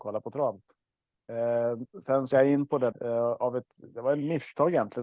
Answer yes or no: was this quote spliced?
yes